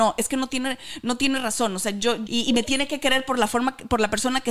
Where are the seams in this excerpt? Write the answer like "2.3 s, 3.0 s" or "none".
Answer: 2.3 s